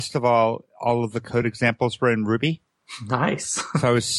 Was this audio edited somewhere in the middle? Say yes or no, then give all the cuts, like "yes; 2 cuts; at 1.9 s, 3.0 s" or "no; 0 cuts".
no; 0 cuts